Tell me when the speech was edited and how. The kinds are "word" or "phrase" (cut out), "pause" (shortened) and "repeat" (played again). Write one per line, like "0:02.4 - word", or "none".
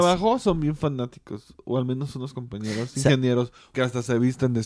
0:03.7 - word